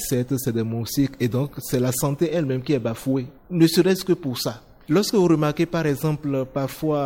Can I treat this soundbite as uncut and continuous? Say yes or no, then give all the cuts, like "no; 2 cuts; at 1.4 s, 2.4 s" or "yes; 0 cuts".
yes; 0 cuts